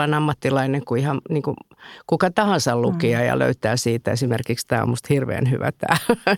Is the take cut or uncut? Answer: uncut